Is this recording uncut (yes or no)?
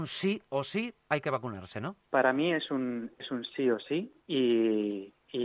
no